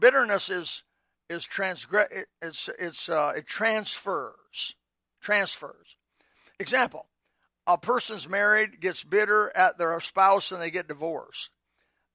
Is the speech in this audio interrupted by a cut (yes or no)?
no